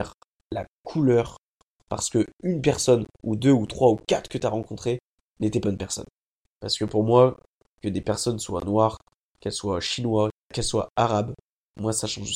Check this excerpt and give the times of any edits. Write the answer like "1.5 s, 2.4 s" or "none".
5.6 s

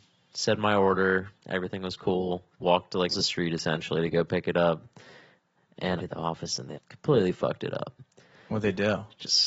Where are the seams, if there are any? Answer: 1.4 s, 2.5 s, 3.1 s, 6.0 s, 6.7 s

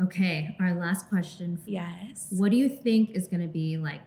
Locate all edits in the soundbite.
1.7 s

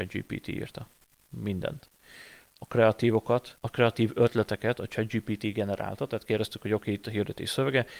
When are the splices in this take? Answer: none

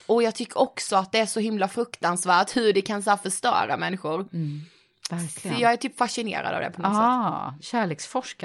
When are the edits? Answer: none

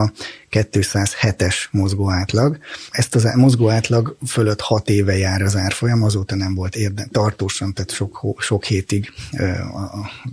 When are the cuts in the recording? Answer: none

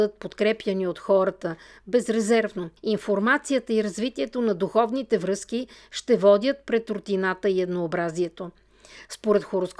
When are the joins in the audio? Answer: 2.8 s

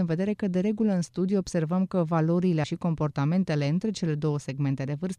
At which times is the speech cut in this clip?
2.6 s

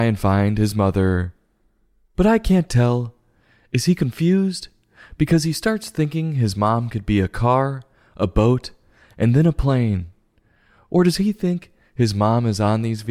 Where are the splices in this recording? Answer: none

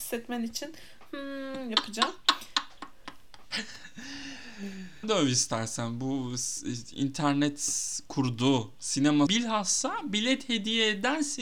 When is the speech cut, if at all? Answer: 5.0 s, 9.3 s

